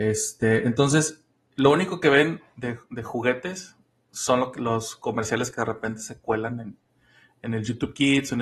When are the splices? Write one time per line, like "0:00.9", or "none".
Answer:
none